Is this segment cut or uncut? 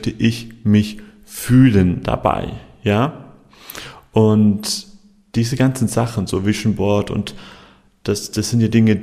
uncut